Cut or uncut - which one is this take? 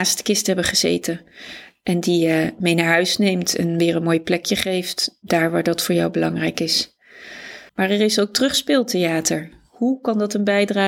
cut